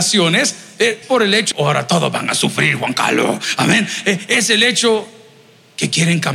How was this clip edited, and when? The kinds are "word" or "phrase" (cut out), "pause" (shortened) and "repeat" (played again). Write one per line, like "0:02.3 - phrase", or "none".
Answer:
0:01.0 - word
0:01.5 - phrase

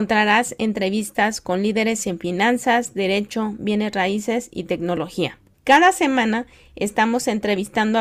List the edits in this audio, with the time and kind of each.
none

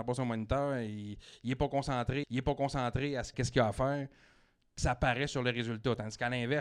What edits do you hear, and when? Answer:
0:02.2 - repeat
0:03.3 - word
0:04.8 - word

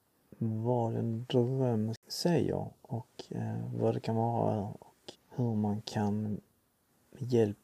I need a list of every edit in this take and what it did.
0:05.1 - word

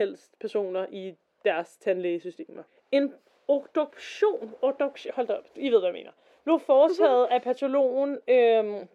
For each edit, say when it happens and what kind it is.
none

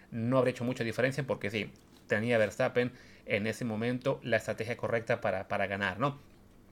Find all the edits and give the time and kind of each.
none

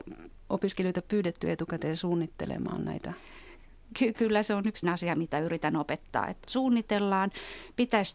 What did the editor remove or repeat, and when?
0:04.1 - word
0:04.8 - word
0:06.4 - word

